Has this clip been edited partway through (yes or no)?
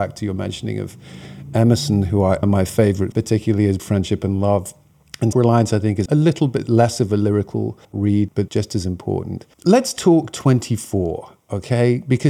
yes